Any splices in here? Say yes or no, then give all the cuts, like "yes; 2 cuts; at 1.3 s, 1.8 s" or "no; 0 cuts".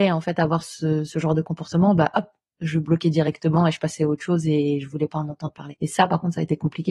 no; 0 cuts